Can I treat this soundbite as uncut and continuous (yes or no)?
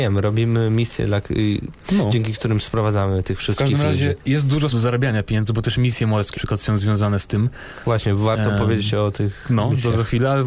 no